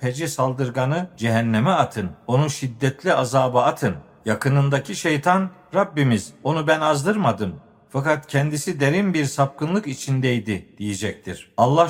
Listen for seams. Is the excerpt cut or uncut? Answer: uncut